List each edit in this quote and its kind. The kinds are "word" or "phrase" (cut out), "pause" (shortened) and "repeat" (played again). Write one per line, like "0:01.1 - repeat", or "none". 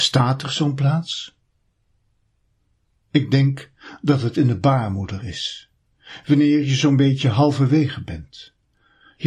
none

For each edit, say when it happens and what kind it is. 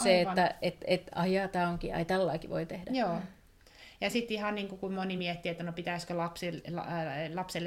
none

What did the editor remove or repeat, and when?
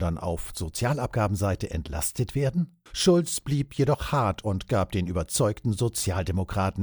0:02.9 - pause

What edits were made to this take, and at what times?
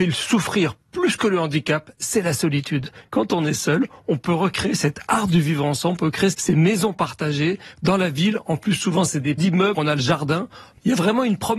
0:06.3 - word
0:09.4 - word
0:09.7 - word

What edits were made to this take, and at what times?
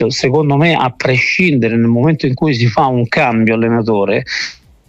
none

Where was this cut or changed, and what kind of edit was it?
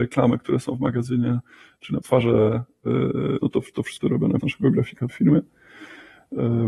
0:02.0 - word
0:03.4 - word
0:04.0 - word
0:04.4 - word
0:05.1 - word

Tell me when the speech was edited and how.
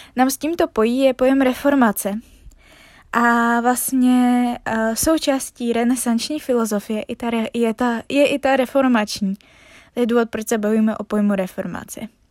none

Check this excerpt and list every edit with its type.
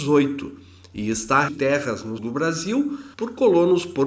0:01.5 - phrase
0:02.2 - word
0:03.1 - pause

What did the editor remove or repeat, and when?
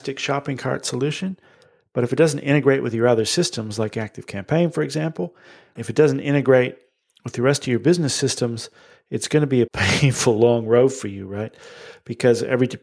0:05.8 - word
0:09.7 - word

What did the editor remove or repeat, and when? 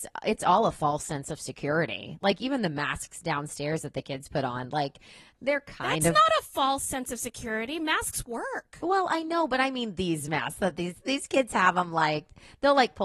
none

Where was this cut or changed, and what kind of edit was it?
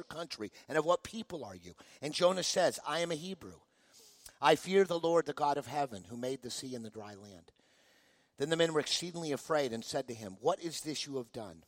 none

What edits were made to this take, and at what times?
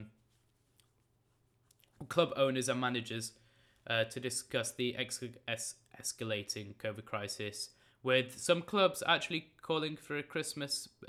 none

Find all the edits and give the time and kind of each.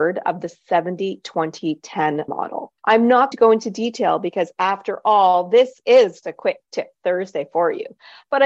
0:02.3 - word
0:02.8 - pause
0:03.3 - word
0:06.2 - word

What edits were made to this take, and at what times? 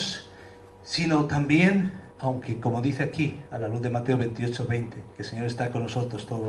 0:02.1 - pause
0:03.5 - pause
0:05.1 - pause

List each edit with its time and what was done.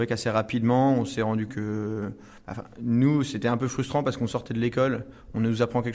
0:01.5 - word

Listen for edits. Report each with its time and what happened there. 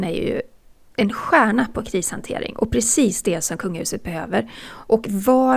none

